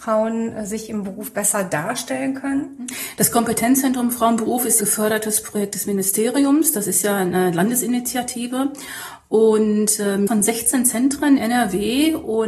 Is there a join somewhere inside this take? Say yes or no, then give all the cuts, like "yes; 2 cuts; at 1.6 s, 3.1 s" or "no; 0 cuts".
yes; 3 cuts; at 4.8 s, 10.3 s, 11.4 s